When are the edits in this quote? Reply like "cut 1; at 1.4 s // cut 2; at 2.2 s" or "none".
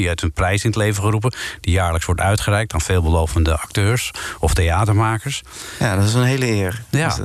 none